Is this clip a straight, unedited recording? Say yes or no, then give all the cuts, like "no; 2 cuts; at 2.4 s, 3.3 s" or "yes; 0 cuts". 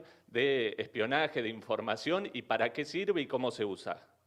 yes; 0 cuts